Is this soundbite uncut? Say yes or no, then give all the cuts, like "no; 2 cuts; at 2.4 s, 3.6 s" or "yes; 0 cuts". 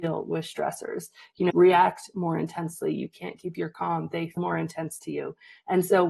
no; 2 cuts; at 1.5 s, 4.4 s